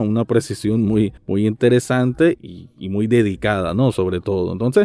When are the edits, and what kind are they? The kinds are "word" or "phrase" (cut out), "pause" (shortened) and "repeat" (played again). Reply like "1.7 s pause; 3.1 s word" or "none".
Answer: 1.2 s pause; 2.4 s word